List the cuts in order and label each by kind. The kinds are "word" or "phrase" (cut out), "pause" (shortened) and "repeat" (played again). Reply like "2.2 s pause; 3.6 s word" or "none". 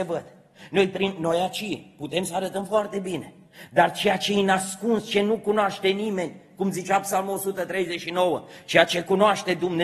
none